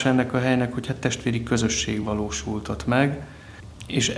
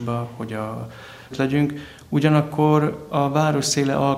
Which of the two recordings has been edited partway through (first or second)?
second